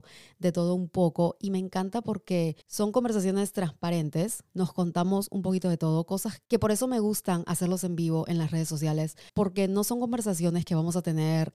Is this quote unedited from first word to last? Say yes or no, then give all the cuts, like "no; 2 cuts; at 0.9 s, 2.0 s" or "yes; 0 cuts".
no; 4 cuts; at 2.6 s, 4.5 s, 6.4 s, 9.3 s